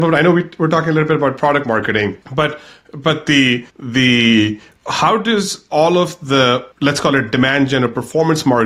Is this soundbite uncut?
no; 3 cuts; at 2.2 s, 3.7 s, 6.7 s

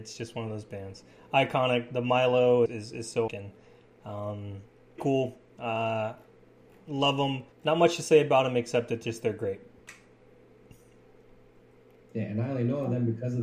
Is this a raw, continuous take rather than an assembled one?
no; 4 cuts; at 2.7 s, 3.3 s, 5.0 s, 7.5 s

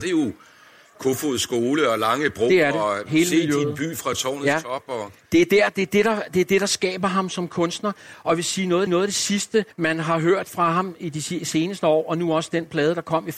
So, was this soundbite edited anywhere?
yes; 2 cuts; at 8.9 s, 9.7 s

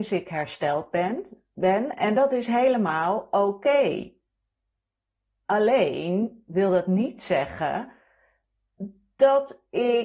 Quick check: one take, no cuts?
yes; 0 cuts

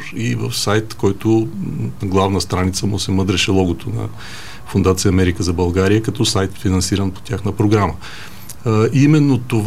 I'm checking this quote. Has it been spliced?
yes; 1 cut; at 6.5 s

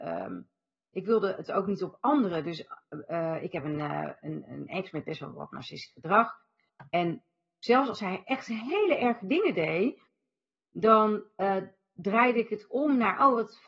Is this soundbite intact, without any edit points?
yes; 0 cuts

